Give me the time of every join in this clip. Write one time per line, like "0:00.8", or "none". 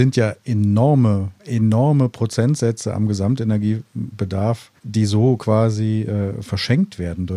0:01.4
0:04.8